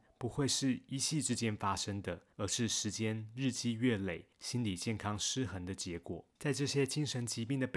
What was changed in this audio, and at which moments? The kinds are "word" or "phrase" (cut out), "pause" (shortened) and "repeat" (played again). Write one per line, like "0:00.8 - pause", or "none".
0:02.3 - pause
0:04.3 - pause
0:06.4 - pause